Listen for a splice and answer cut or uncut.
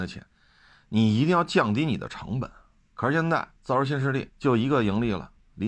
cut